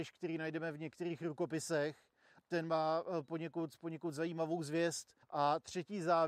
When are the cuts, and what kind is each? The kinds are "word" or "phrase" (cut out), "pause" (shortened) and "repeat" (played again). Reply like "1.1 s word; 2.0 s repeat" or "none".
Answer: 2.4 s word; 5.2 s pause